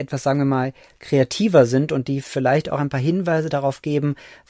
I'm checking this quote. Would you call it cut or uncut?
uncut